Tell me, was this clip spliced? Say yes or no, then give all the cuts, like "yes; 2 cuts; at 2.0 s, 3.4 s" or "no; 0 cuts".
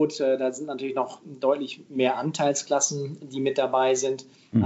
no; 0 cuts